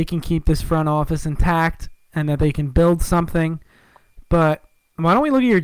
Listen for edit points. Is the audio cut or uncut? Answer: uncut